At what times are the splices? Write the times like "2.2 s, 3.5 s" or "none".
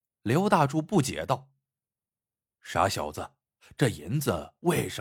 none